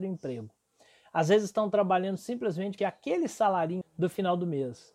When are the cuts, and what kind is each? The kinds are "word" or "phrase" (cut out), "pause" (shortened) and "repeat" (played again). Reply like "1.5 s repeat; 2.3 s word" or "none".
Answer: 2.8 s phrase; 3.8 s word